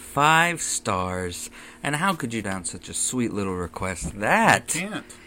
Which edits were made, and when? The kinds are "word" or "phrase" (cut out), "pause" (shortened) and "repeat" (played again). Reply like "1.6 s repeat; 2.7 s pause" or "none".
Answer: 2.4 s word; 4.1 s word